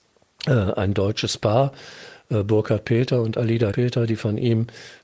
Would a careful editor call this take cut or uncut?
cut